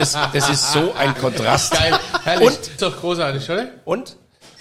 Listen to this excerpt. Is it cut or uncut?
cut